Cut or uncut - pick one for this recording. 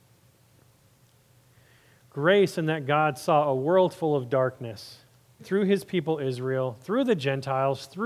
cut